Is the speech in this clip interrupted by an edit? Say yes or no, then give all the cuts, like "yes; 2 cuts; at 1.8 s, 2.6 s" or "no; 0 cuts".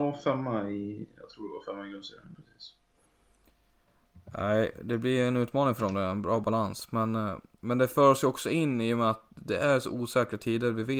no; 0 cuts